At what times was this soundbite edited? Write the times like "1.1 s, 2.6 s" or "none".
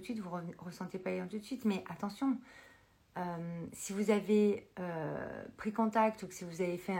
none